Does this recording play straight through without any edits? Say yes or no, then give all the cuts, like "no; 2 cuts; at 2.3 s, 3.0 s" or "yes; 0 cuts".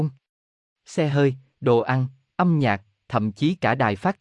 yes; 0 cuts